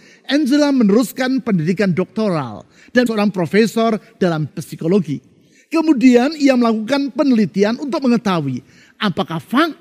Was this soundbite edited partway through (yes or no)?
yes